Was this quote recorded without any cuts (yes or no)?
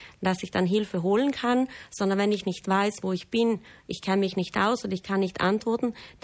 yes